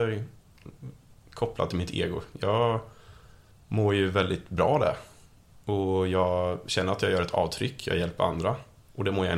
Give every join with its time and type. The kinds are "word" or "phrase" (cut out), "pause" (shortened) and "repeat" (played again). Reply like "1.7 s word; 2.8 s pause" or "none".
none